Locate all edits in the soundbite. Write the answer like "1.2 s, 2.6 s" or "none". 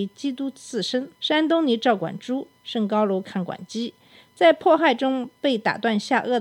1.1 s